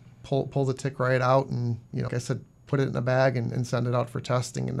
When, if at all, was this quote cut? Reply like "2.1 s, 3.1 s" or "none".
2.1 s